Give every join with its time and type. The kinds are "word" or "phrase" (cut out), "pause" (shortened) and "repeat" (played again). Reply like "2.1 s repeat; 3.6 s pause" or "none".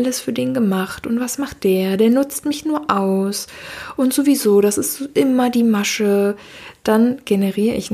none